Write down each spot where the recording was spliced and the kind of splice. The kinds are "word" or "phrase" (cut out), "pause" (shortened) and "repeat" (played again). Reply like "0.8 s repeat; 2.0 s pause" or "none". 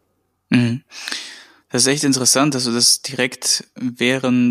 none